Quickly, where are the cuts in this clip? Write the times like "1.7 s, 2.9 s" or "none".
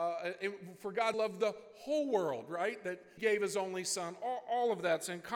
1.1 s, 3.2 s

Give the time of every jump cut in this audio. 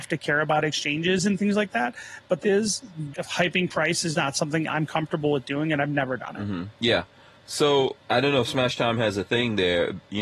2.4 s, 3.1 s, 4.1 s, 6.7 s, 8.0 s

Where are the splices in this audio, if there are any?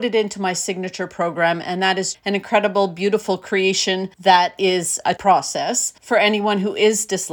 2.1 s, 4.1 s, 5.2 s, 6.0 s

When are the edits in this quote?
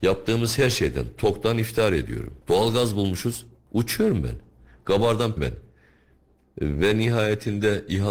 2.4 s, 5.4 s

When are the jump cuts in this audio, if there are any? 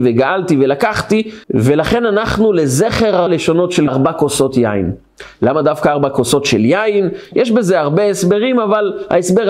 1.4 s, 3.3 s, 3.9 s

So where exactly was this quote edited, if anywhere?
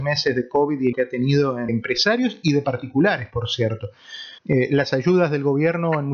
0.9 s, 1.7 s, 4.4 s

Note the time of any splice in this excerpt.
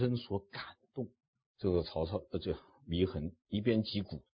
1.4 s

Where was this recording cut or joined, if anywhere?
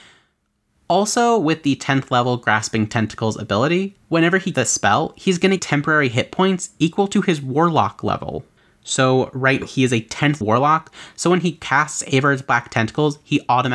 4.0 s, 4.5 s, 5.6 s, 8.6 s, 9.6 s, 10.4 s

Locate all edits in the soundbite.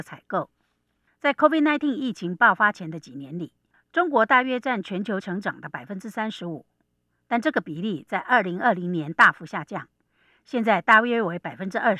5.2 s

